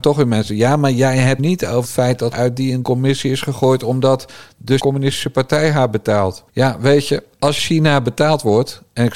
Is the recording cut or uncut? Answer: cut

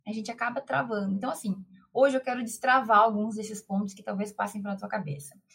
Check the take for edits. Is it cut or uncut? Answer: uncut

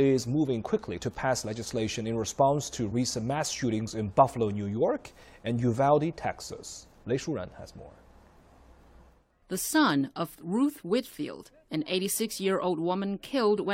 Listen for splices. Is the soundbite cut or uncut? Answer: uncut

